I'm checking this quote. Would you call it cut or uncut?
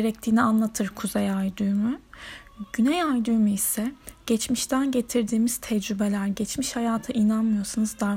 uncut